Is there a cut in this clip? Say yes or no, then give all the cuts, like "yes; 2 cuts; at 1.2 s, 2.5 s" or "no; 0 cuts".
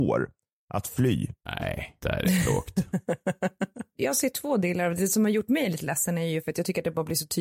yes; 1 cut; at 2.0 s